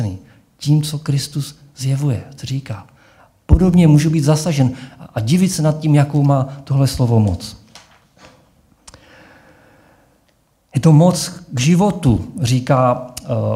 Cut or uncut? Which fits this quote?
uncut